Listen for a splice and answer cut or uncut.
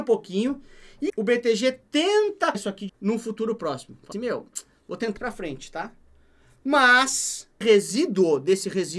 cut